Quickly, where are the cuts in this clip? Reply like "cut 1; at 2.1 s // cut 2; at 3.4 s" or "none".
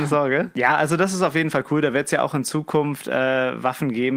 none